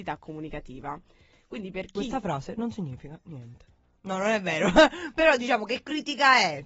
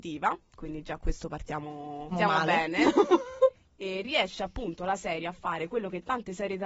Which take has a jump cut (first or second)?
second